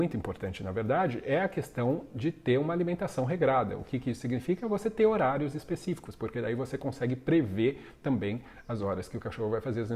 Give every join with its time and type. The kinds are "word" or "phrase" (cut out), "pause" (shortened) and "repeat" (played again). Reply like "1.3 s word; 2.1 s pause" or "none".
none